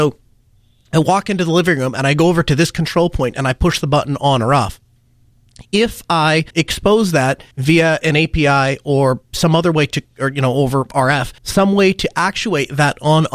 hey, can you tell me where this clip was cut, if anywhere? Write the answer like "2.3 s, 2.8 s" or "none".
6.5 s, 7.5 s, 11.4 s